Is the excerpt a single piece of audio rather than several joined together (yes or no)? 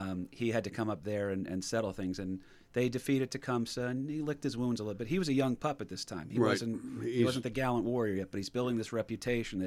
yes